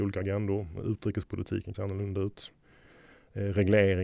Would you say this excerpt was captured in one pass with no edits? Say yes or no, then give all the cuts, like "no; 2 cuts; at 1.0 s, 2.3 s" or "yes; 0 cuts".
no; 1 cut; at 1.7 s